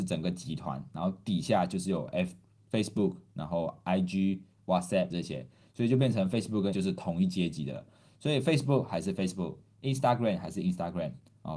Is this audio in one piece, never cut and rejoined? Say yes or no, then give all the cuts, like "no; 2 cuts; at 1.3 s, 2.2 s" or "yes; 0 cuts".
no; 2 cuts; at 5.1 s, 6.7 s